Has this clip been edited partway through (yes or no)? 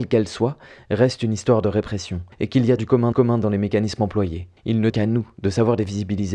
yes